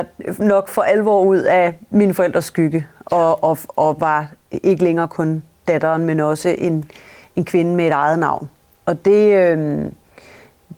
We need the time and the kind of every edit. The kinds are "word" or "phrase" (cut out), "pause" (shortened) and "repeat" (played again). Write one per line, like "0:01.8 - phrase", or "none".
none